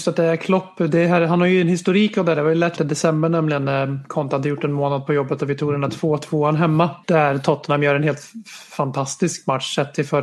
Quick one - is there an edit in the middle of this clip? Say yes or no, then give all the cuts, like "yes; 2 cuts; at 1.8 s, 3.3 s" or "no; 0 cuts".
yes; 2 cuts; at 2.8 s, 7.0 s